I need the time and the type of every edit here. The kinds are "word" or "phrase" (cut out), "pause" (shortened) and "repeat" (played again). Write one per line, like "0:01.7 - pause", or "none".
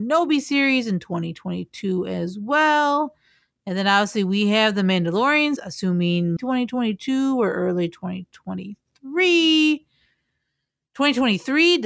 0:05.6 - word
0:06.4 - word